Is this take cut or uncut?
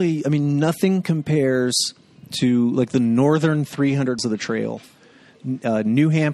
cut